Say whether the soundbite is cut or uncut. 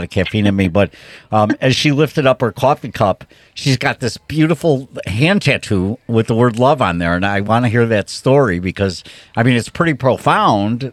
uncut